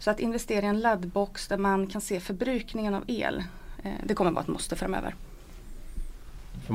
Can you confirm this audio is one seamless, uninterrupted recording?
yes; 0 cuts

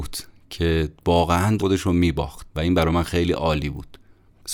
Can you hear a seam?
yes; 2 cuts; at 1.6 s, 2.5 s

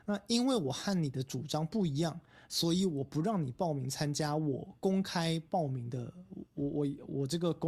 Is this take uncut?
yes; 0 cuts

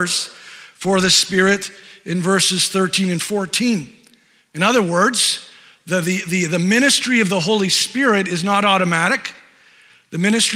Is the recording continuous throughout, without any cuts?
yes; 0 cuts

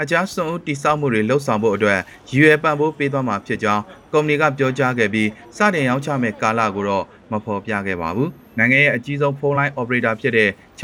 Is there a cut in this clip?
no; 0 cuts

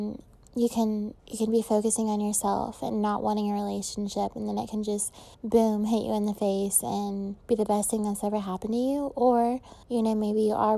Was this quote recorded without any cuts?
no; 4 cuts; at 1.2 s, 5.3 s, 7.4 s, 9.8 s

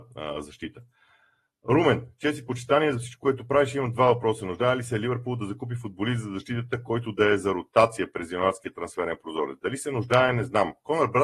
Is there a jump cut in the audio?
no; 0 cuts

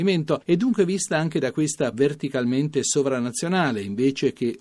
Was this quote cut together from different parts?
yes; 1 cut; at 1.9 s

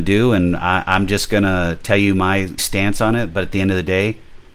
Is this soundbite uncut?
no; 1 cut; at 2.6 s

